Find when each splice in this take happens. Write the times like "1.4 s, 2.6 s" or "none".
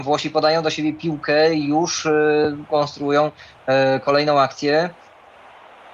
none